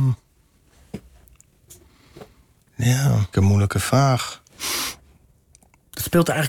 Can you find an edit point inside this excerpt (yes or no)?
yes